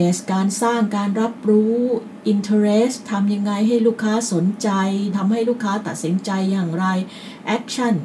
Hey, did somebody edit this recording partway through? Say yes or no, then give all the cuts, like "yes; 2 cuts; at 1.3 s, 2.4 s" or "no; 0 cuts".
yes; 1 cut; at 5.1 s